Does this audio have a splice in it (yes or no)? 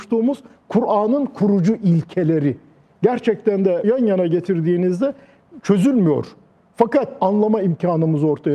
yes